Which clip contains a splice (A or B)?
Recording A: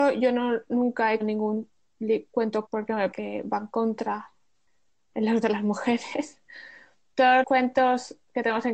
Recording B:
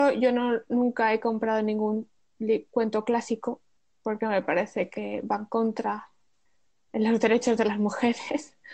A